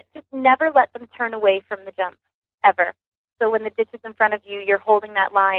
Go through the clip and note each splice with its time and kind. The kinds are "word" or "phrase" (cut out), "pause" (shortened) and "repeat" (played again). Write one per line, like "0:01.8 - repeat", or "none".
none